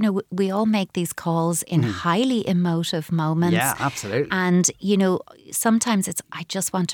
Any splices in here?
no; 0 cuts

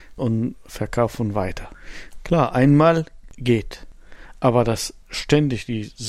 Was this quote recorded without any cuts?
yes; 0 cuts

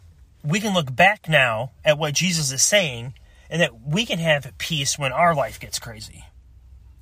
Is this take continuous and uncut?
yes; 0 cuts

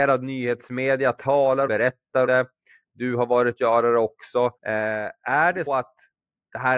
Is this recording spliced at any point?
yes; 5 cuts; at 1.7 s, 2.3 s, 3.6 s, 4.6 s, 5.7 s

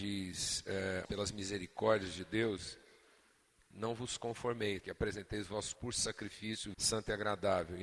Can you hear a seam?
yes; 5 cuts; at 1.0 s, 3.7 s, 4.8 s, 5.7 s, 6.7 s

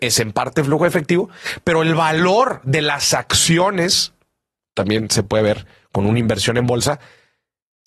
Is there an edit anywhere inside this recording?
no; 0 cuts

